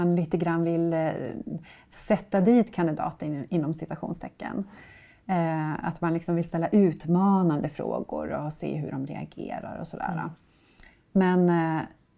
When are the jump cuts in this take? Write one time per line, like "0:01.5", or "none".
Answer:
none